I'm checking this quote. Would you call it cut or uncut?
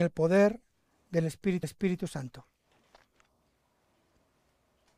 cut